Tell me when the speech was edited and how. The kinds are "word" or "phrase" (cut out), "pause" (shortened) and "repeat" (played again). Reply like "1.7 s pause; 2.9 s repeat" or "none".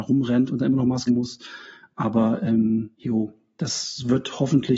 1.1 s word; 2.9 s pause